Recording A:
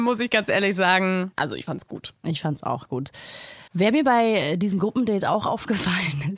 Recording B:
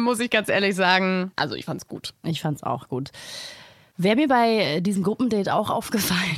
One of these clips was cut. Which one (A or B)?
A